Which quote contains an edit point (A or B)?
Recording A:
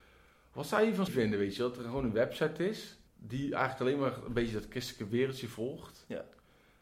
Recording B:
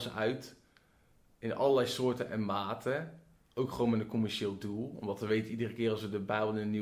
A